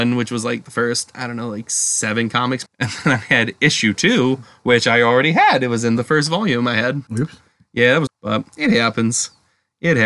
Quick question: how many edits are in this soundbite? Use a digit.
3